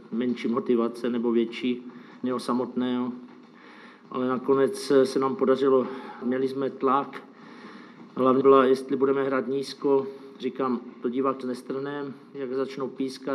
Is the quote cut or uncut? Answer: cut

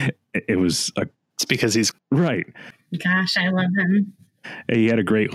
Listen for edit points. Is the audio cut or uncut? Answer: cut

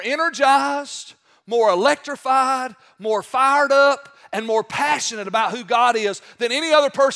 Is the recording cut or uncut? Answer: uncut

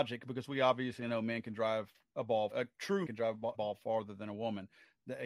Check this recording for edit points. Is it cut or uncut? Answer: cut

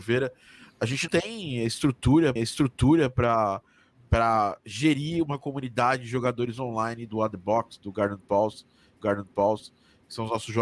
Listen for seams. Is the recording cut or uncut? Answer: cut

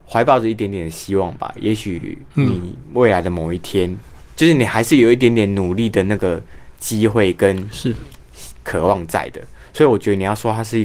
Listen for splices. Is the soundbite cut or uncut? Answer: cut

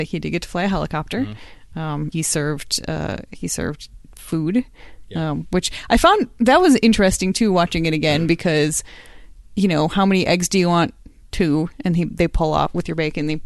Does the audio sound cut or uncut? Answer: cut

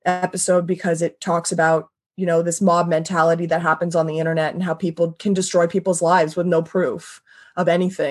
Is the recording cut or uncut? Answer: uncut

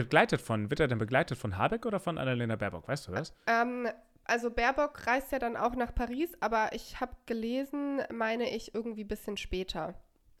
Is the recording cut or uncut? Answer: uncut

